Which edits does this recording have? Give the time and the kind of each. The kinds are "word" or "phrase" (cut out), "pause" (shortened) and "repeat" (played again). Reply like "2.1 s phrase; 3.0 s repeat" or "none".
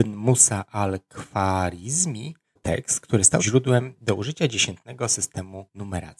2.6 s word; 3.4 s word